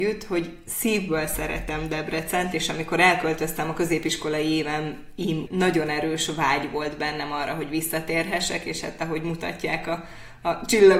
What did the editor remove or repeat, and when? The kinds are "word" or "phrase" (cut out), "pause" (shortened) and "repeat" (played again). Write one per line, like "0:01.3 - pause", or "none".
0:05.5 - phrase